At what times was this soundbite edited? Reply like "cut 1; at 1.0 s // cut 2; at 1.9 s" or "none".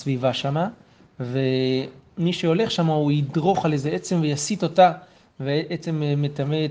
none